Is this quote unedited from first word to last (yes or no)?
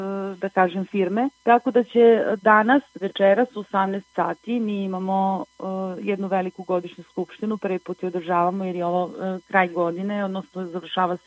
no